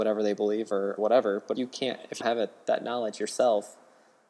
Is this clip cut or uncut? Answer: cut